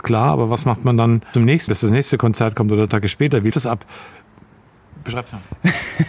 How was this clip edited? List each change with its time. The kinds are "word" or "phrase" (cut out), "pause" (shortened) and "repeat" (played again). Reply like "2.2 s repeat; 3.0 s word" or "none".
1.3 s word; 1.7 s word; 2.9 s word; 3.5 s word